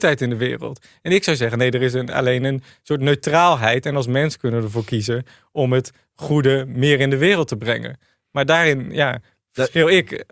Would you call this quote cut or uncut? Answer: uncut